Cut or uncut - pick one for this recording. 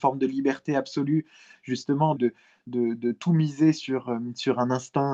cut